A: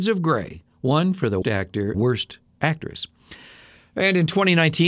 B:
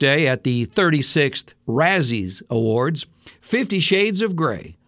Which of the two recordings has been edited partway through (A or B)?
A